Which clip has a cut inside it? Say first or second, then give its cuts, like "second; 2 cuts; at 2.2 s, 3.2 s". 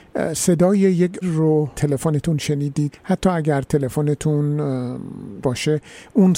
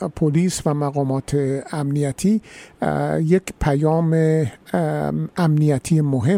first; 4 cuts; at 1.2 s, 1.7 s, 2.9 s, 5.4 s